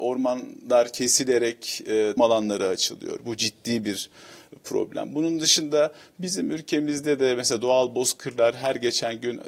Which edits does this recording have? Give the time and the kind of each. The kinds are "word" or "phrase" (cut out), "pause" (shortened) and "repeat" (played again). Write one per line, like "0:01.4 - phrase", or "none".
0:02.2 - word